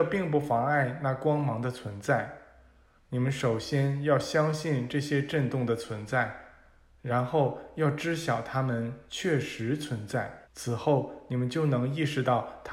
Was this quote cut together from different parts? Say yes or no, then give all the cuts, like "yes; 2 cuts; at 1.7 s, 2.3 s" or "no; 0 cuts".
yes; 1 cut; at 10.4 s